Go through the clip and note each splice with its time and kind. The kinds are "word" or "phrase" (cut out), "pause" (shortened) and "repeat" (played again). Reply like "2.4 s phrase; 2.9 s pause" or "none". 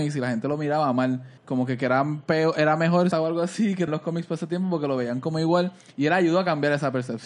1.4 s pause; 3.1 s phrase; 3.9 s word